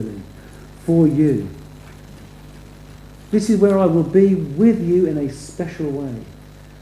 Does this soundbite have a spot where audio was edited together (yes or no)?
no